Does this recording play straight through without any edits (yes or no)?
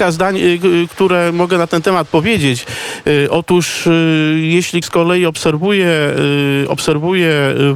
no